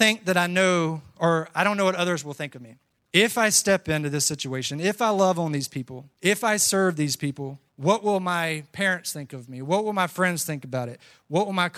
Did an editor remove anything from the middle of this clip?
yes; 3 cuts; at 2.8 s, 6.1 s, 7.7 s

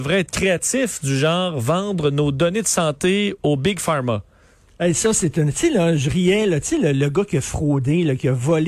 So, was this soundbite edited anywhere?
no; 0 cuts

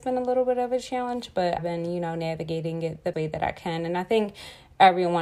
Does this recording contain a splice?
yes; 2 cuts; at 1.6 s, 3.1 s

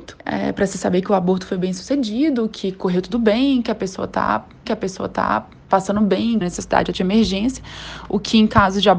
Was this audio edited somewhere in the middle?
yes; 3 cuts; at 4.6 s, 6.4 s, 6.9 s

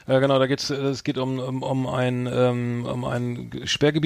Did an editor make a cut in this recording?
no; 0 cuts

